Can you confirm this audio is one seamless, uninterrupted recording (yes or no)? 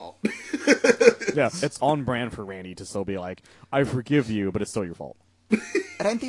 yes